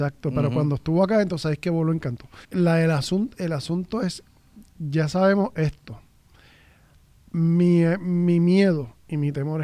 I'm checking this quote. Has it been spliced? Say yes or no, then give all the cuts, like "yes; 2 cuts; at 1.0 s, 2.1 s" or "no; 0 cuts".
yes; 1 cut; at 2.4 s